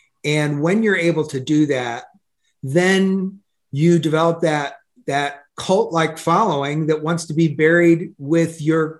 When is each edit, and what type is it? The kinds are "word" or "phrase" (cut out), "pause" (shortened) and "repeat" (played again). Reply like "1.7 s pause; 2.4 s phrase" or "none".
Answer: 5.5 s pause